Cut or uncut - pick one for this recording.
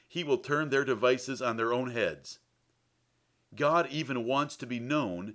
uncut